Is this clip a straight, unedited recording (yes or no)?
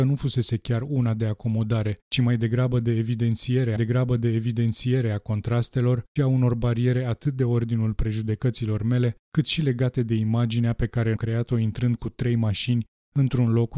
no